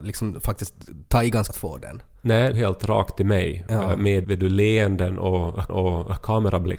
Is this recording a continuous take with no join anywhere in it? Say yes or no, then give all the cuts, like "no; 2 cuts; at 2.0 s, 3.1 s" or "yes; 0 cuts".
no; 4 cuts; at 1.5 s, 2.5 s, 4.2 s, 5.7 s